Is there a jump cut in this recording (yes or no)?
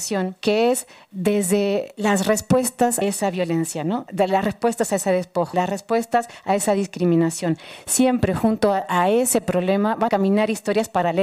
yes